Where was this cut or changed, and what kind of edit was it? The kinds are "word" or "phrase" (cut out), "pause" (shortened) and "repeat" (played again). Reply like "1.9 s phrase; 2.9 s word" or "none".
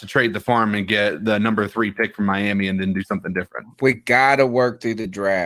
3.7 s pause